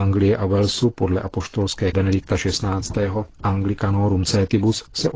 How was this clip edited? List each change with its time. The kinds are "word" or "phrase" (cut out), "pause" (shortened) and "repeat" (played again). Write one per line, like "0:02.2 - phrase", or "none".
0:01.9 - word